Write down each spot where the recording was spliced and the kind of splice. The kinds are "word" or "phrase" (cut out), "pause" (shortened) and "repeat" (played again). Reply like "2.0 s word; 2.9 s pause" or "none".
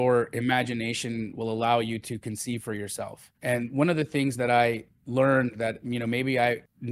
3.3 s pause